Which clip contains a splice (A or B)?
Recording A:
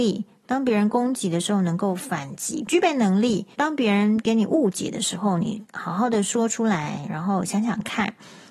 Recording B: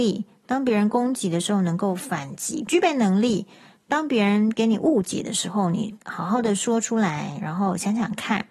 A